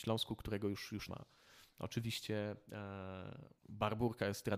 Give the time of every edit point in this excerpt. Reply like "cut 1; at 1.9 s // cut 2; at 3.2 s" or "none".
cut 1; at 1.1 s // cut 2; at 3.6 s